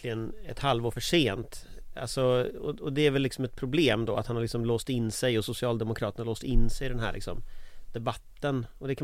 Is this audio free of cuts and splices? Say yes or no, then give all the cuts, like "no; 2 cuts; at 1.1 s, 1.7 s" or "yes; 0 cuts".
yes; 0 cuts